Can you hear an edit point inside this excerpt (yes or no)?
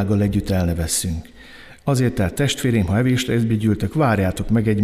no